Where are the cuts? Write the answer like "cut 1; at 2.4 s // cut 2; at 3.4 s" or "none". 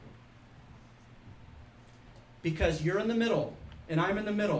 none